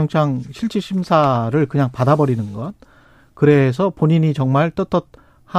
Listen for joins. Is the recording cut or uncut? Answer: uncut